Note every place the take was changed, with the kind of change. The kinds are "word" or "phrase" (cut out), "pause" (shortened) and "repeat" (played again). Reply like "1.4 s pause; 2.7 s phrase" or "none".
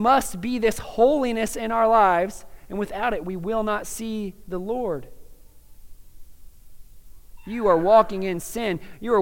none